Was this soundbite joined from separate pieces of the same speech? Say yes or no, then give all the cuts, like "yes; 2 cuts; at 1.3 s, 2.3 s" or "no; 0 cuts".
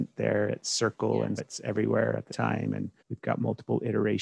yes; 3 cuts; at 1.4 s, 2.3 s, 3.0 s